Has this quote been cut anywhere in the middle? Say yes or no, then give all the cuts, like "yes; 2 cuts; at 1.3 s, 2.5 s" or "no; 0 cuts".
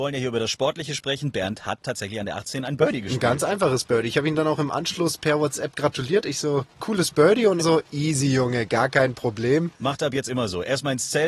yes; 1 cut; at 7.6 s